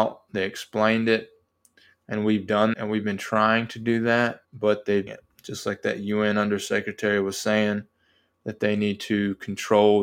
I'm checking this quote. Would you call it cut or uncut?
cut